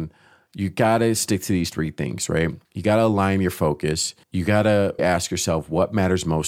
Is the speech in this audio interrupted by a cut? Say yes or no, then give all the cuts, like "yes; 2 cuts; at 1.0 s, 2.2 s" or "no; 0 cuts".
yes; 3 cuts; at 2.6 s, 4.2 s, 5.0 s